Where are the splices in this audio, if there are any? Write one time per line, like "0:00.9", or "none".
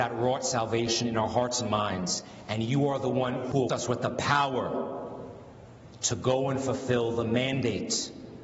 0:03.7